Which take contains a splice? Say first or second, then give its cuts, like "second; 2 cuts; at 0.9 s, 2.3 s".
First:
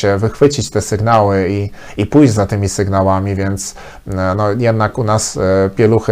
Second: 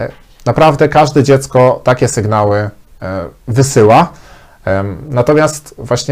second; 1 cut; at 3.4 s